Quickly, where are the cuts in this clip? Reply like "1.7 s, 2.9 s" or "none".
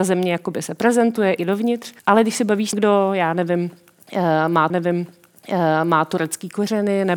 1.4 s, 2.0 s, 2.7 s, 4.7 s

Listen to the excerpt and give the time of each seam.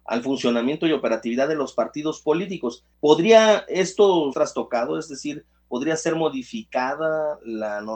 2.9 s, 4.3 s

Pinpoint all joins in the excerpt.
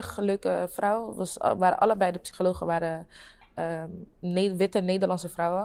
none

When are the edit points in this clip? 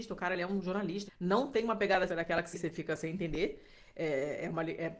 1.1 s, 2.1 s, 2.5 s

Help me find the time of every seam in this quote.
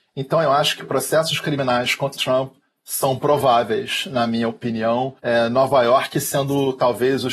2.2 s, 5.2 s

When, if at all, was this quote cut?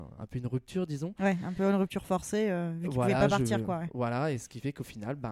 none

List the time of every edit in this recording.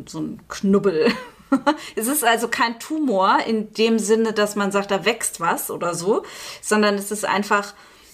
none

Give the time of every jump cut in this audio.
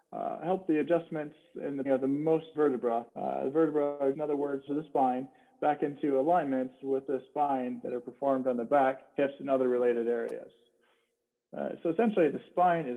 1.8 s, 2.5 s, 3.1 s, 4.1 s, 4.7 s, 7.1 s, 9.1 s

